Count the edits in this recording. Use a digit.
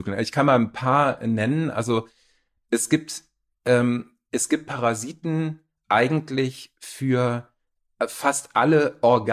0